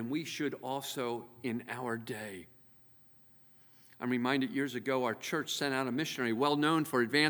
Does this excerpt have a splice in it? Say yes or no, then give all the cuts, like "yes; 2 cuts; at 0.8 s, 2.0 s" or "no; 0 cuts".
no; 0 cuts